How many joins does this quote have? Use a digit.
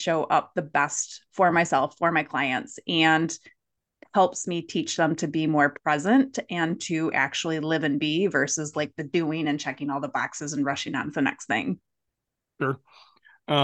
0